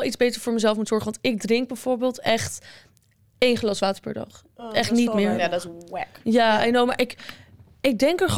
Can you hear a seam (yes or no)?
no